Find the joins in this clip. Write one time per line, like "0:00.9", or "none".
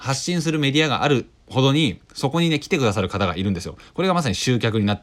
0:01.4